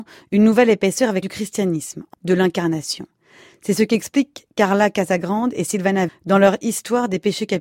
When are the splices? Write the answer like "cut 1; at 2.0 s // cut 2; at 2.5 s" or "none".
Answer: cut 1; at 1.2 s // cut 2; at 2.1 s // cut 3; at 6.1 s